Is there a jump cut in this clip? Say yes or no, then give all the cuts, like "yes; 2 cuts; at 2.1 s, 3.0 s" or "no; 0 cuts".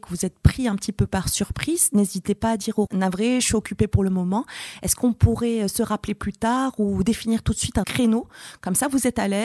yes; 2 cuts; at 2.9 s, 7.8 s